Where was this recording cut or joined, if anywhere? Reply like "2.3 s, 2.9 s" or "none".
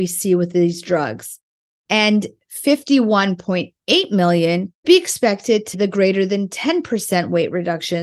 4.8 s, 5.7 s